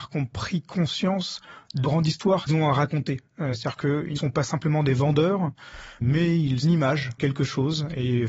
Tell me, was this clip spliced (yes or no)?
yes